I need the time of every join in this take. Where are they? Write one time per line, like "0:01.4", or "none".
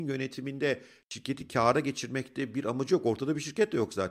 none